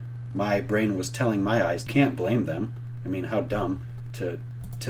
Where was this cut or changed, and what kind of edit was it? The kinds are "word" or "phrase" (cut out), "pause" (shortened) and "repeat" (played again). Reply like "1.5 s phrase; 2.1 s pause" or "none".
1.9 s phrase